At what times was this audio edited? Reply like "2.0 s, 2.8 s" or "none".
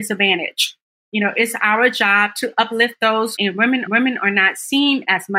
3.4 s, 3.9 s